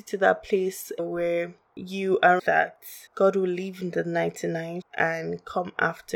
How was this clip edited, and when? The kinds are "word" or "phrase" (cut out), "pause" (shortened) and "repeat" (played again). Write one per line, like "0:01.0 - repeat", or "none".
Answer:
0:01.0 - word
0:02.4 - word
0:03.1 - pause
0:04.8 - word

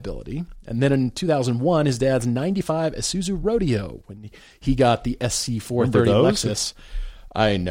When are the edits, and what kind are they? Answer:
none

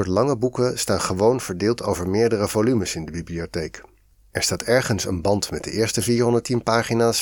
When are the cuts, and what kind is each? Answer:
none

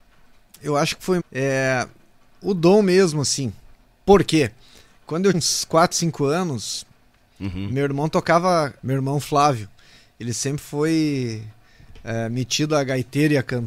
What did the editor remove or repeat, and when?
0:01.2 - word
0:05.3 - word
0:08.8 - word

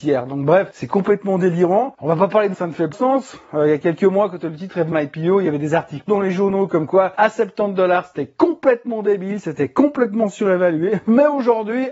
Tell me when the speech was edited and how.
0:02.5 - word
0:02.9 - word
0:04.9 - word
0:06.1 - word

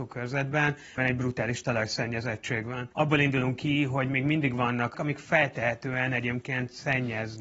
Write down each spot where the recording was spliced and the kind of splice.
0:01.0 - word
0:02.9 - pause
0:04.9 - phrase

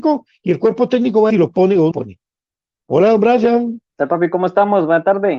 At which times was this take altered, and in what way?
0:01.3 - phrase
0:01.9 - phrase
0:03.9 - pause

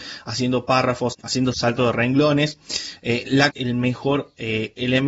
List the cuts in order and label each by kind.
0:03.5 - phrase

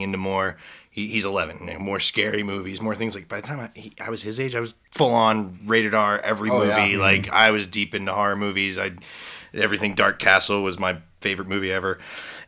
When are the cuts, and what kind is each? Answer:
0:04.8 - pause

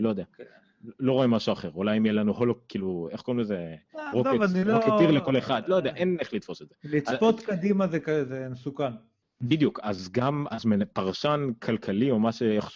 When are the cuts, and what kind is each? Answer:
none

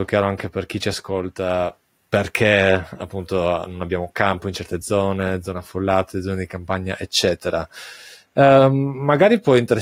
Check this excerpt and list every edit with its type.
none

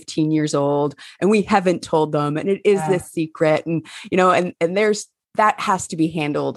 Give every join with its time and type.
none

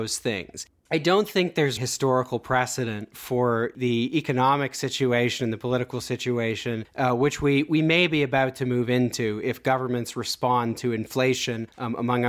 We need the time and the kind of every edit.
0:01.8 - word

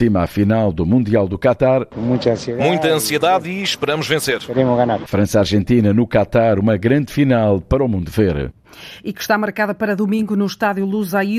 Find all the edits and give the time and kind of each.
none

